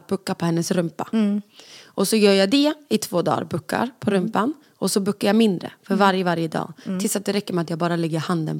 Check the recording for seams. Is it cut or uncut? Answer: uncut